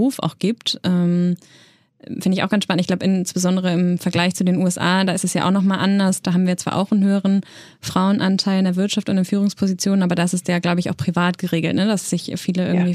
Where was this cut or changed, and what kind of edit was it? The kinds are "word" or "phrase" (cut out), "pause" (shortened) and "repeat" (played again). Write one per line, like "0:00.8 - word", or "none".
none

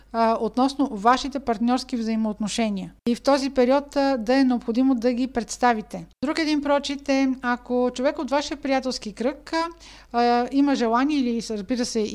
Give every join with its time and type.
0:03.0 - pause
0:06.1 - pause

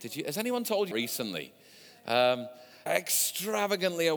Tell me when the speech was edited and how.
0:00.9 - word
0:02.9 - word

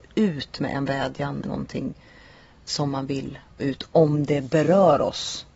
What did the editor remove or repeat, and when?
0:01.4 - word
0:03.6 - word

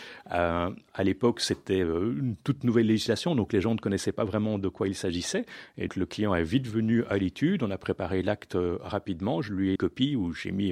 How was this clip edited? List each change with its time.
0:05.9 - word
0:09.8 - phrase

